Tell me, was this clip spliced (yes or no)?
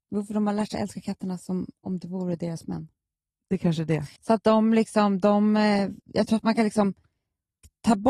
yes